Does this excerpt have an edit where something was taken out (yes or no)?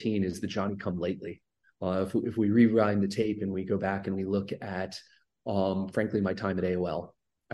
no